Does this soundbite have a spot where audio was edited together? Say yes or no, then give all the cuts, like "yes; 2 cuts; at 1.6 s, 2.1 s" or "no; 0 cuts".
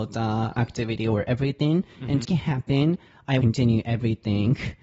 yes; 2 cuts; at 2.2 s, 3.4 s